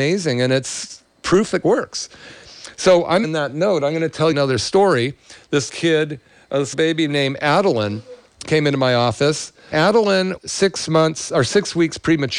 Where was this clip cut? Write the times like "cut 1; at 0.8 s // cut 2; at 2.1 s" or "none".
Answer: cut 1; at 1.6 s // cut 2; at 3.2 s // cut 3; at 4.3 s // cut 4; at 5.7 s // cut 5; at 6.7 s // cut 6; at 8.4 s // cut 7; at 9.7 s // cut 8; at 10.4 s

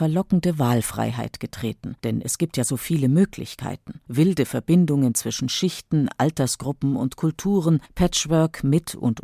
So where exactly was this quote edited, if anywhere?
cut 1; at 2.0 s // cut 2; at 4.1 s // cut 3; at 7.9 s

